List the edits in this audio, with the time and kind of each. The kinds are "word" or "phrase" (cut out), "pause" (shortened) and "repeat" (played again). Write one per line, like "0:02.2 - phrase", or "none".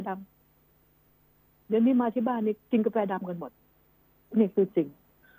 none

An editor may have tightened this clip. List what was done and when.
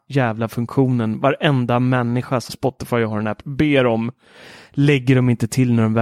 0:02.5 - word
0:03.4 - word

